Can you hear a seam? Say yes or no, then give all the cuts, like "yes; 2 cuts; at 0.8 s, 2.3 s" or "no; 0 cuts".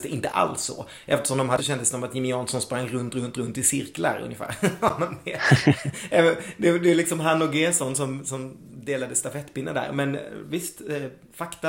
yes; 1 cut; at 1.6 s